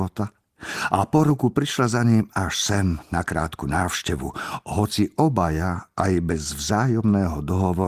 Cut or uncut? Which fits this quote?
uncut